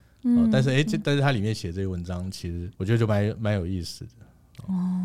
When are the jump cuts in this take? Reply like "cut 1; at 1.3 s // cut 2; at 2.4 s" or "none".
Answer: cut 1; at 2.7 s